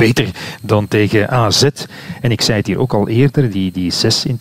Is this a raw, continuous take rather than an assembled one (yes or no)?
yes